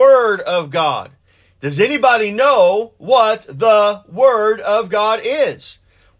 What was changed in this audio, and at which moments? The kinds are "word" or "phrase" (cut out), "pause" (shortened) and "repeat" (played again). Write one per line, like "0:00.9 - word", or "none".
none